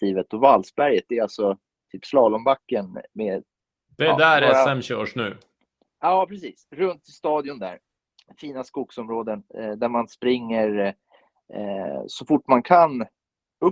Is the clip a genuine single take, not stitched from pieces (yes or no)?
yes